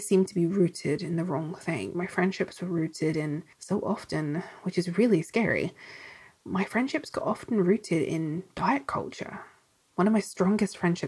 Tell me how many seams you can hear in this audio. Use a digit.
1